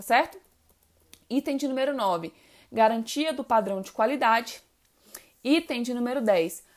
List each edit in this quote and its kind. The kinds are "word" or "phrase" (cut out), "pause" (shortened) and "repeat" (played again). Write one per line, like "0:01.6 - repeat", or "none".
none